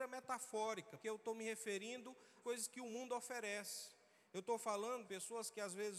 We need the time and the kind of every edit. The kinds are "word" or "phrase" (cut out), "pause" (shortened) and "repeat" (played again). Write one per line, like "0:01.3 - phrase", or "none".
0:01.0 - word
0:02.4 - word
0:05.0 - word